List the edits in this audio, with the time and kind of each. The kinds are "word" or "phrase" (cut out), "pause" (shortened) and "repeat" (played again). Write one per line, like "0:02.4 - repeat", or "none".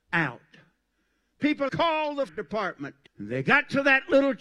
0:01.7 - word
0:02.3 - word
0:03.1 - pause